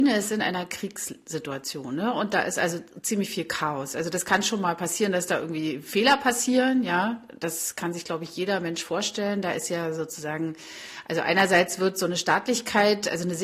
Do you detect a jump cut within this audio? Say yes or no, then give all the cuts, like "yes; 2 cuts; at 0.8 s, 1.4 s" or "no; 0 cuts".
no; 0 cuts